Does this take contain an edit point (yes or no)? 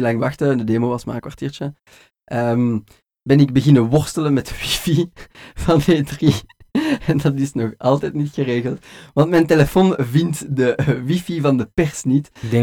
no